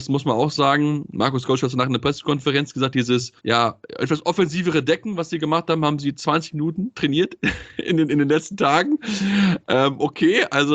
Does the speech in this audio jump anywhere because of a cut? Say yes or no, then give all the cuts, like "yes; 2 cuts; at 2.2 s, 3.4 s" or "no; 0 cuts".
yes; 1 cut; at 3.4 s